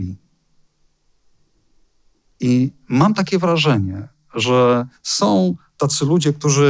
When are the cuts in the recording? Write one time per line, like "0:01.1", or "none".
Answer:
0:05.0